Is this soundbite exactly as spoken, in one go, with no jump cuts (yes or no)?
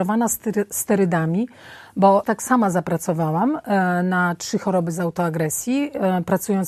no